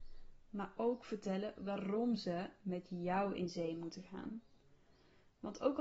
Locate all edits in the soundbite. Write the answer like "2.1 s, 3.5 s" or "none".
none